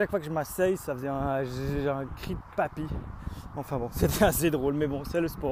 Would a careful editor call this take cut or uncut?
uncut